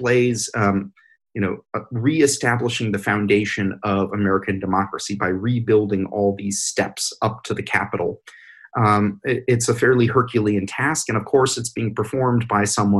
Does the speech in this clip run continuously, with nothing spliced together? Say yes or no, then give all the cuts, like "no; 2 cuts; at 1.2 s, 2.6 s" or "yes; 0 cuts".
yes; 0 cuts